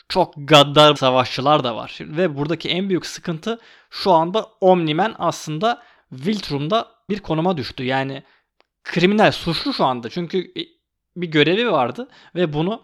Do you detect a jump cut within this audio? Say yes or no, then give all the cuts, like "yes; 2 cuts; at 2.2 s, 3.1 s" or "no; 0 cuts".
yes; 2 cuts; at 1.0 s, 7.1 s